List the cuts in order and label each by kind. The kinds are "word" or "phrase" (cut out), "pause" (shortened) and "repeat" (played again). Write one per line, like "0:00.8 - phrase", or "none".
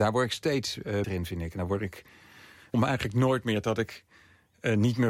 0:01.0 - word
0:02.7 - word